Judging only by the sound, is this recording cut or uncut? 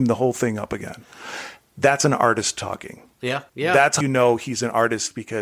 cut